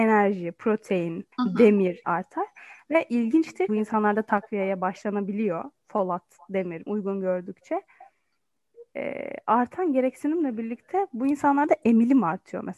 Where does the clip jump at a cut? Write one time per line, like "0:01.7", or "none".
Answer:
0:01.3
0:02.0
0:03.7
0:06.9